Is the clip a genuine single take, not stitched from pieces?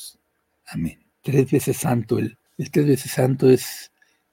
no; 2 cuts; at 1.1 s, 2.5 s

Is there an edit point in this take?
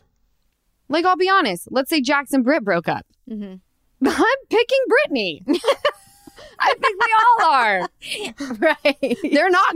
no; 0 cuts

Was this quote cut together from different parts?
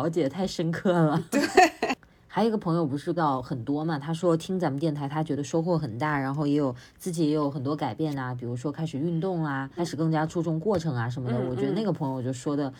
yes; 2 cuts; at 3.2 s, 9.8 s

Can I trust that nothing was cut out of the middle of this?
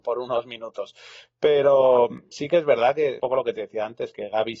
no; 2 cuts; at 2.3 s, 3.2 s

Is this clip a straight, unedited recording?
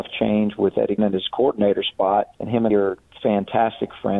no; 3 cuts; at 1.0 s, 2.3 s, 2.7 s

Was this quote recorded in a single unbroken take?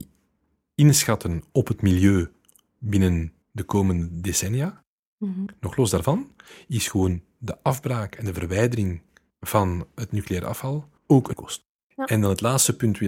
no; 4 cuts; at 3.4 s, 9.3 s, 11.0 s, 11.3 s

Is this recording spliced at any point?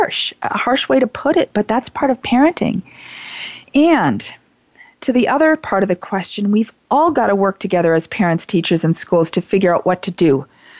no; 0 cuts

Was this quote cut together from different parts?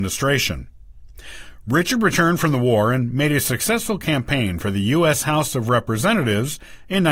no; 0 cuts

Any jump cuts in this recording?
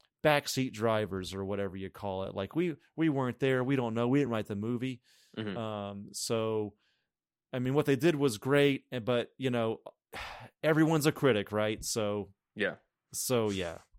no; 0 cuts

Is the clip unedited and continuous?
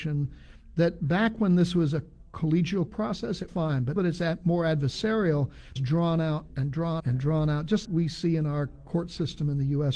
no; 6 cuts; at 2.9 s, 3.5 s, 4.0 s, 5.8 s, 7.0 s, 7.8 s

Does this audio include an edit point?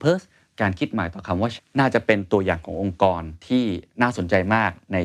yes; 1 cut; at 1.6 s

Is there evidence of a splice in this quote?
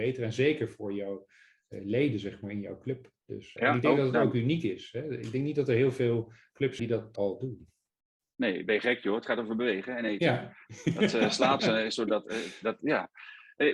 yes; 4 cuts; at 3.6 s, 6.8 s, 7.2 s, 11.6 s

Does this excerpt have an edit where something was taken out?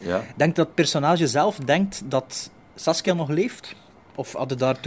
no; 0 cuts

